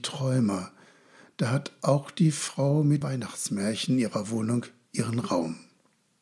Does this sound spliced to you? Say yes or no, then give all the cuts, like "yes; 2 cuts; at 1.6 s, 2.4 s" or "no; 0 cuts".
yes; 1 cut; at 3.0 s